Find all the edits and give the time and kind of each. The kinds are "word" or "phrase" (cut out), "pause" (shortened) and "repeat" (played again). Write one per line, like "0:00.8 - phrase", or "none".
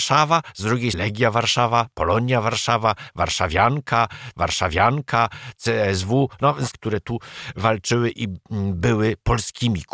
0:00.9 - word
0:04.3 - repeat
0:06.7 - phrase